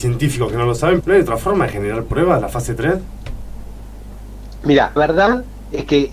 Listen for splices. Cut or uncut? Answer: cut